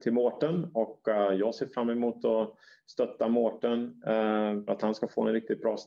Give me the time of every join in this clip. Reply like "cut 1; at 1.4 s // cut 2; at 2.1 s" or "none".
cut 1; at 4.7 s